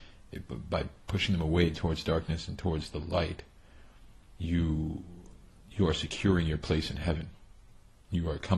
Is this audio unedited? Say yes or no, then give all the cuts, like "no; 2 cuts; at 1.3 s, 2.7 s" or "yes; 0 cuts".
yes; 0 cuts